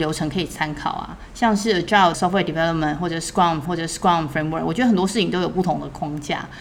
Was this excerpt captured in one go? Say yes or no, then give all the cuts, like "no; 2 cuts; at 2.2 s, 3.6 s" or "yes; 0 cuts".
no; 2 cuts; at 2.1 s, 3.7 s